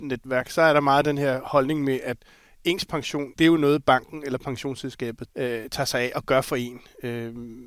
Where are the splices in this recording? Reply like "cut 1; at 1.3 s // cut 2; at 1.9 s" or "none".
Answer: cut 1; at 3.3 s // cut 2; at 5.3 s

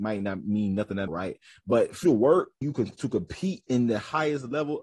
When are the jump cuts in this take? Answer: cut 1; at 1.1 s // cut 2; at 2.0 s // cut 3; at 2.6 s

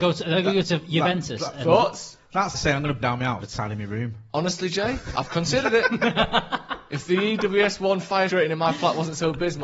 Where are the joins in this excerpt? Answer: cut 1; at 2.5 s // cut 2; at 3.0 s // cut 3; at 3.4 s // cut 4; at 8.3 s

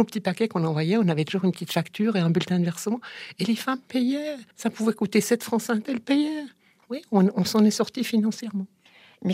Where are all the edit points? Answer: cut 1; at 4.5 s // cut 2; at 5.8 s

